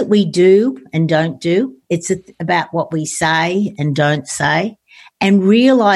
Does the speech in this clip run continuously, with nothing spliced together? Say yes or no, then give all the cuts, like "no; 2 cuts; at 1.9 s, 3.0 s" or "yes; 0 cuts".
yes; 0 cuts